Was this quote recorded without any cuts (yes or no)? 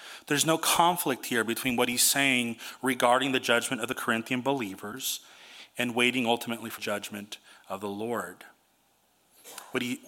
no